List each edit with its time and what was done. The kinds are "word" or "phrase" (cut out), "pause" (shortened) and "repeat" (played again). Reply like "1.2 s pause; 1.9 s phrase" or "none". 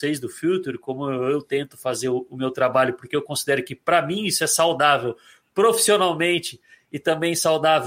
none